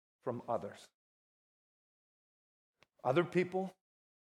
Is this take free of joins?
yes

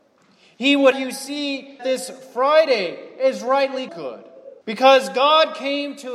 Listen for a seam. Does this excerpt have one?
yes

